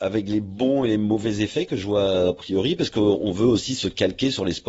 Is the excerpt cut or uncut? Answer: uncut